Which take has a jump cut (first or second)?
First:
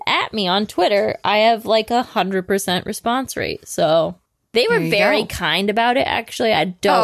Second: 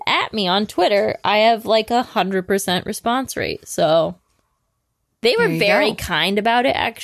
first